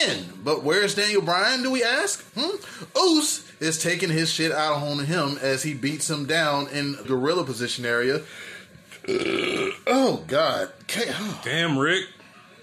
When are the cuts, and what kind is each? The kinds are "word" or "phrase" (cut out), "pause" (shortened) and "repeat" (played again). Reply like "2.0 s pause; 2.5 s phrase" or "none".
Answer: 2.3 s pause; 7.0 s word